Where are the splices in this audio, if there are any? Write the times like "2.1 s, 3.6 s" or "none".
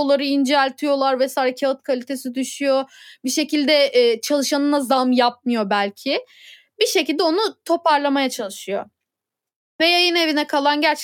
none